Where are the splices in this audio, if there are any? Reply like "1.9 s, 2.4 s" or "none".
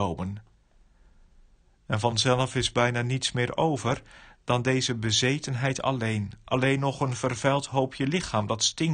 2.1 s